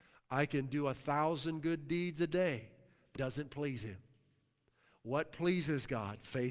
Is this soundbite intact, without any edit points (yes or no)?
no